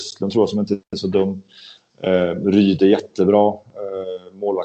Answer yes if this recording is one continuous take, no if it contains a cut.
yes